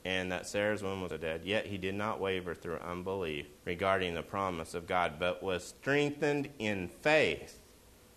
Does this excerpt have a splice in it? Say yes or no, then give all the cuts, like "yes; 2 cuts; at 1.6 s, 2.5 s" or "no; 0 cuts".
yes; 2 cuts; at 1.1 s, 3.6 s